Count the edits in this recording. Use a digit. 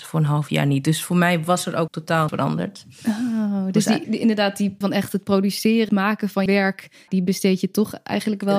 7